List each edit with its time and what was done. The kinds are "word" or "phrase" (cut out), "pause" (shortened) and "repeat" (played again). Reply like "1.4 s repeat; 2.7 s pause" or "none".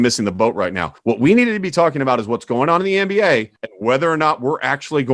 1.0 s pause; 3.6 s pause